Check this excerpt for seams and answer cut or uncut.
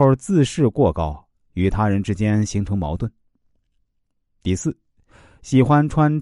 uncut